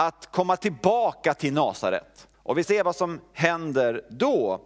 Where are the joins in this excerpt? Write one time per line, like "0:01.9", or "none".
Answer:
0:02.3
0:02.6